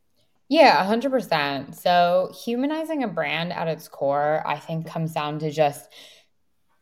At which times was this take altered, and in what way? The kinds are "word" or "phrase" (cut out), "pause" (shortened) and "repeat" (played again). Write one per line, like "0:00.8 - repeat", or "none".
0:04.8 - word